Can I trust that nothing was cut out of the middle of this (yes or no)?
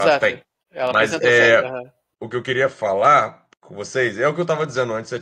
yes